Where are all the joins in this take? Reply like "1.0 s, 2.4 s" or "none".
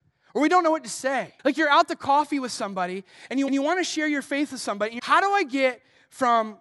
1.4 s, 3.5 s, 5.0 s